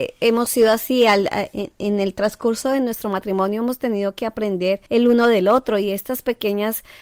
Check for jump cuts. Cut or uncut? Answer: cut